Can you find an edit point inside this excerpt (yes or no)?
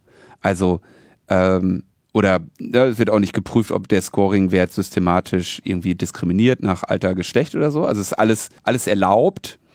yes